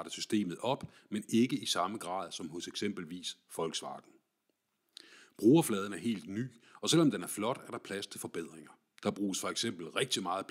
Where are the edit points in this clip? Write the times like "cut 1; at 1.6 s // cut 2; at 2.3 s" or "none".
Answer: none

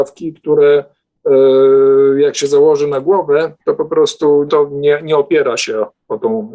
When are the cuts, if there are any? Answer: cut 1; at 3.6 s // cut 2; at 4.5 s

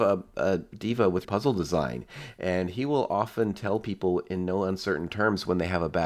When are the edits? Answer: cut 1; at 1.2 s

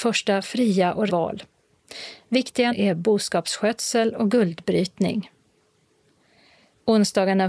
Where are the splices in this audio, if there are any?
cut 1; at 1.1 s // cut 2; at 2.7 s

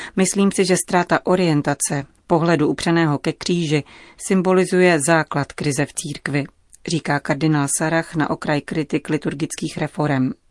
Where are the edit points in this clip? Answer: none

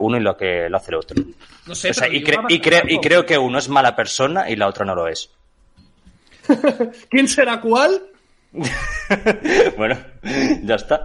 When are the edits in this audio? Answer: none

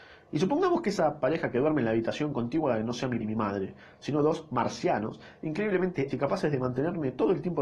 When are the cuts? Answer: cut 1; at 3.2 s // cut 2; at 6.1 s

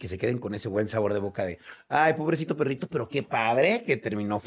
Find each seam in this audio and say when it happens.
none

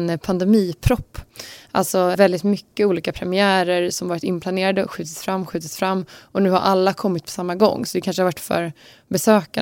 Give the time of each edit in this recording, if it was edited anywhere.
cut 1; at 2.1 s // cut 2; at 8.3 s

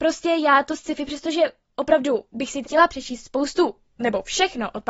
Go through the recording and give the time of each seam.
cut 1; at 2.6 s

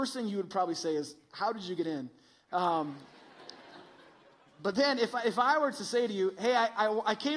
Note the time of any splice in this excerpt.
none

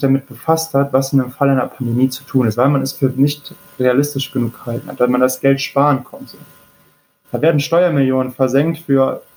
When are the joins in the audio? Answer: none

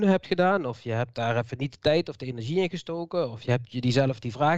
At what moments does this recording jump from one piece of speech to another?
none

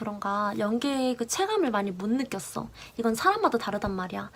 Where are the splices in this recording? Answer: none

